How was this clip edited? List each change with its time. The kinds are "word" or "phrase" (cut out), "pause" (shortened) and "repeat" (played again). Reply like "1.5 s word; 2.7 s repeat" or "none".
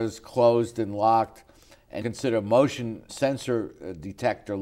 2.0 s word; 3.1 s word